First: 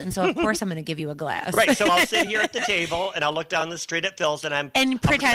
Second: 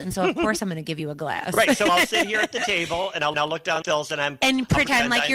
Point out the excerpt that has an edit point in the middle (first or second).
second